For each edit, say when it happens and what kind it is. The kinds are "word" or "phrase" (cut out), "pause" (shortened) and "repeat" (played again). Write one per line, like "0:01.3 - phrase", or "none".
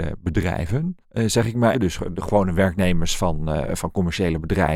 0:01.0 - pause
0:01.7 - word